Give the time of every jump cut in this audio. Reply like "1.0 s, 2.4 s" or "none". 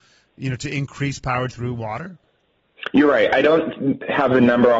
1.5 s